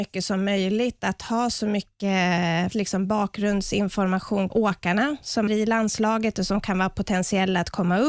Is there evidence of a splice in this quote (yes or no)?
yes